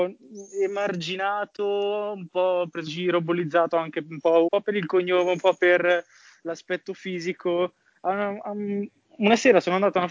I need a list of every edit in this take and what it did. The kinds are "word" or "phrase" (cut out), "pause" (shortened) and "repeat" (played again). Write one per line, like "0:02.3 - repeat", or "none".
0:02.9 - word
0:04.5 - word